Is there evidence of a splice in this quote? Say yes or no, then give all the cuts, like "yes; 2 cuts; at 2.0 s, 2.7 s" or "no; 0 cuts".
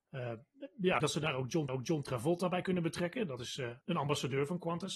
yes; 3 cuts; at 1.0 s, 1.7 s, 3.8 s